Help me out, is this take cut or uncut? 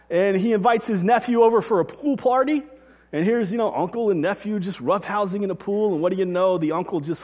uncut